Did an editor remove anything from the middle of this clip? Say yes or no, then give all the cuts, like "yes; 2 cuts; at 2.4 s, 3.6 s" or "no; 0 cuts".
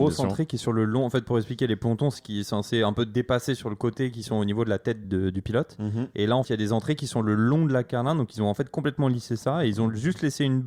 yes; 3 cuts; at 2.2 s, 5.0 s, 6.4 s